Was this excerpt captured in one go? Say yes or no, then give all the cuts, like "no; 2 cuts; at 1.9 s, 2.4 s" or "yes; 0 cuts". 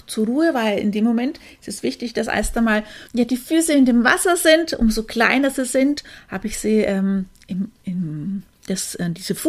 no; 2 cuts; at 3.1 s, 7.8 s